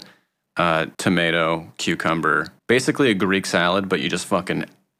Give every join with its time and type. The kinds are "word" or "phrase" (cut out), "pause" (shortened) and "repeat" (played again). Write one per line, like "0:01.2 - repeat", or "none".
0:00.9 - pause
0:02.6 - pause